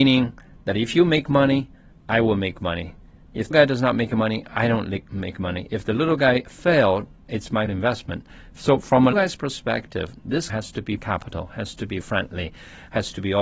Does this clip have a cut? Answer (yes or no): yes